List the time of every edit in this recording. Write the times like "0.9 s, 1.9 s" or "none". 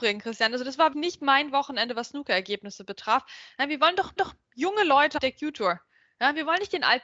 0.9 s, 4.2 s, 5.2 s